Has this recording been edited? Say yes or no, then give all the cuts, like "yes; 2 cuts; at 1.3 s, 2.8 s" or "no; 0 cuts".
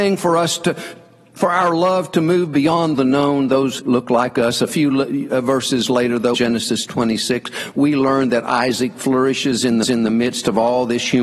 yes; 4 cuts; at 2.9 s, 3.8 s, 6.3 s, 9.8 s